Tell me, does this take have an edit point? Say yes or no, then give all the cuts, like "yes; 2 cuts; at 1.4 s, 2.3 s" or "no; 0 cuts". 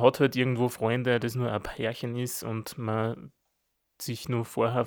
no; 0 cuts